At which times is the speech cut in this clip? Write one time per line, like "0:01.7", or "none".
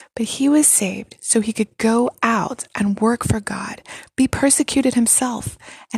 none